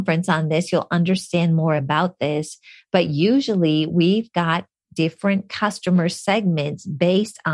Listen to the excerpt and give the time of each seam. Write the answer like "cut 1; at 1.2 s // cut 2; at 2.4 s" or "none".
none